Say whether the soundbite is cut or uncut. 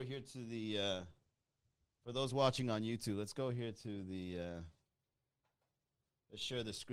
uncut